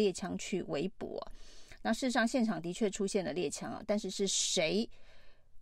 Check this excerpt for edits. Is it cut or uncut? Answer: uncut